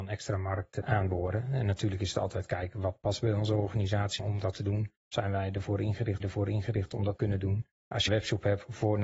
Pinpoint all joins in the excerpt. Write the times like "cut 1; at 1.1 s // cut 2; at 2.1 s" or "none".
cut 1; at 4.2 s // cut 2; at 5.0 s // cut 3; at 6.2 s // cut 4; at 7.2 s // cut 5; at 7.8 s // cut 6; at 8.1 s